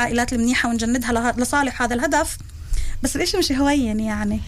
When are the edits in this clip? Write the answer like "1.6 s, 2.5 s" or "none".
none